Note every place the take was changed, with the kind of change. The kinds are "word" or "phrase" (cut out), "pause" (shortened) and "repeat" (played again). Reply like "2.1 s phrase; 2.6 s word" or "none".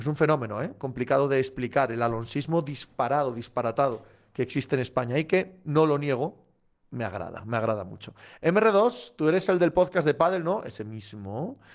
none